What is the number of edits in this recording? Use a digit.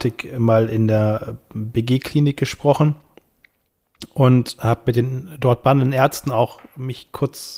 0